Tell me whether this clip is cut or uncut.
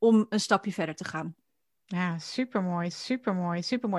cut